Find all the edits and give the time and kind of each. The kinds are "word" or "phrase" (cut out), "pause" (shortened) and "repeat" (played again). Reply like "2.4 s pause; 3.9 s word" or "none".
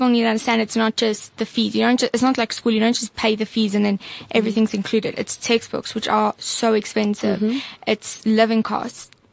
none